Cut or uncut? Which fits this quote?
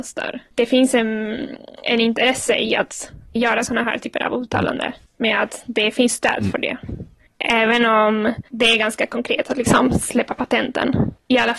cut